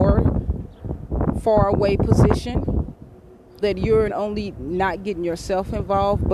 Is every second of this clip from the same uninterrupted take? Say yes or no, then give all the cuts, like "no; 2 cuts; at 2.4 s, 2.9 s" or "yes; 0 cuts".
no; 2 cuts; at 3.6 s, 4.1 s